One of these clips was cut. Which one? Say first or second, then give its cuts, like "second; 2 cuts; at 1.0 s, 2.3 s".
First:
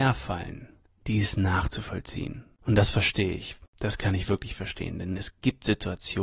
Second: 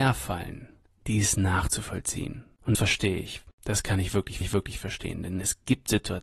second; 2 cuts; at 2.7 s, 4.4 s